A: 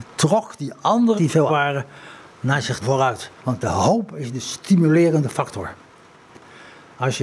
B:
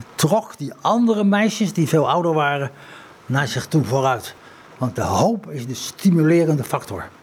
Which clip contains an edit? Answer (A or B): A